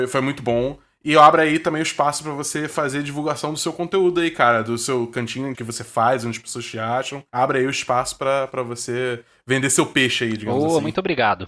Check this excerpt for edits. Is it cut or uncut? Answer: cut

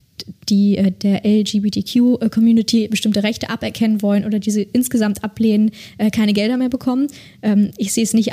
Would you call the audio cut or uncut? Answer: uncut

